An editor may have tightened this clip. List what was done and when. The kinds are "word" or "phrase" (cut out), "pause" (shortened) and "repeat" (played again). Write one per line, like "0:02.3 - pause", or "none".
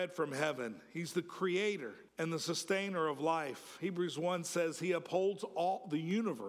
0:02.1 - pause